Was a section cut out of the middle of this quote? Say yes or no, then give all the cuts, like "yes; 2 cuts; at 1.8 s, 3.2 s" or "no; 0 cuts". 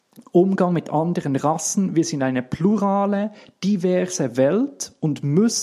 no; 0 cuts